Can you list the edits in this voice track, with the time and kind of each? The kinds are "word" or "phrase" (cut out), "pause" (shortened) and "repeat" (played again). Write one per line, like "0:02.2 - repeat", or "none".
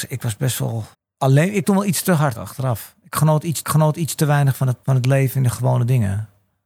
0:00.9 - pause
0:01.6 - phrase
0:02.3 - word
0:03.6 - repeat
0:04.8 - pause